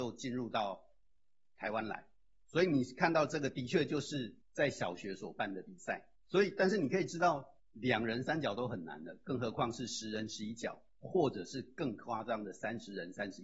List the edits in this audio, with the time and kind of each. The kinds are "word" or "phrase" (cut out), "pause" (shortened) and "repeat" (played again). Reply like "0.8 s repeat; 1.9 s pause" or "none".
2.4 s word; 4.4 s pause; 6.2 s pause; 7.6 s pause

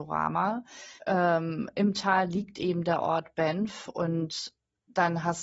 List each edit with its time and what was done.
1.0 s pause

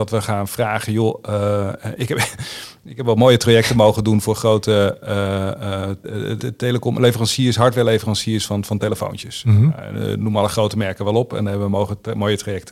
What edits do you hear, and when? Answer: 6.4 s word

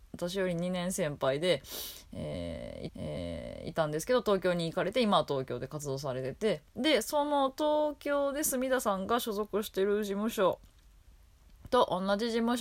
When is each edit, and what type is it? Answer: 2.9 s repeat; 6.7 s pause

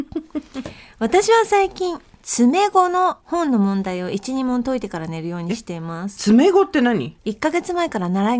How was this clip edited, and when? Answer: 3.2 s pause; 7.2 s pause

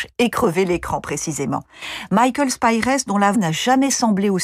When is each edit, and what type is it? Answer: 3.3 s word

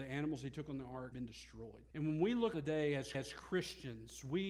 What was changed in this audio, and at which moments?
1.1 s word; 1.9 s pause; 2.5 s word; 3.1 s repeat

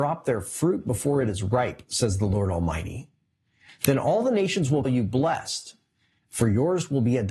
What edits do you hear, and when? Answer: 4.8 s word

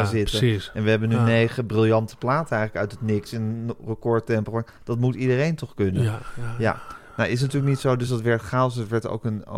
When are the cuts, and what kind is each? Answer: none

